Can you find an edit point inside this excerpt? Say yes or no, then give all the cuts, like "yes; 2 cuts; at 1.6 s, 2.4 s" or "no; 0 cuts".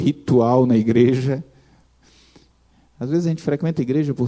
no; 0 cuts